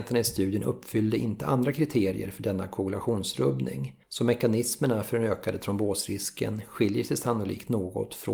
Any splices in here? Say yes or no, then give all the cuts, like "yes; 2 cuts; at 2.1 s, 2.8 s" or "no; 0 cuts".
yes; 1 cut; at 4.0 s